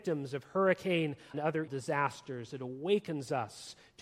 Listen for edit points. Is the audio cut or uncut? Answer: cut